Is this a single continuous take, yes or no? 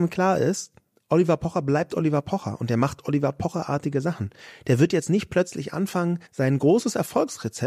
no